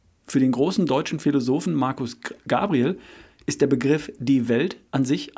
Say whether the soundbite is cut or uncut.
uncut